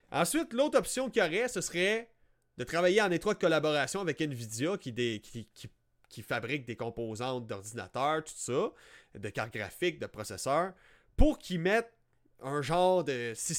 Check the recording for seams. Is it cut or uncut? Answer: uncut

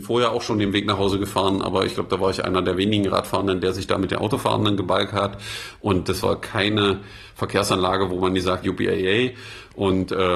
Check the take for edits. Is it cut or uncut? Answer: cut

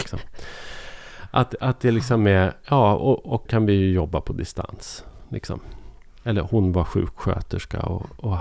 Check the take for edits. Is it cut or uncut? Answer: cut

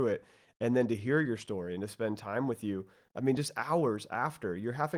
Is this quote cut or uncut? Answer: uncut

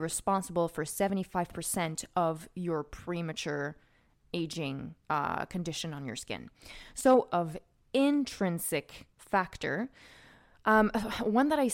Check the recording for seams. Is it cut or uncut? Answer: cut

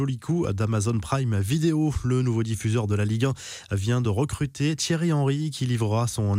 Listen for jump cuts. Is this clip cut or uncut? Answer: uncut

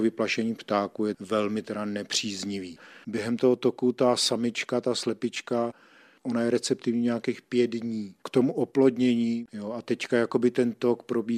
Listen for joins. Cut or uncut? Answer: uncut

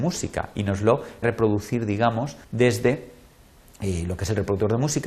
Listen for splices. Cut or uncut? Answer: cut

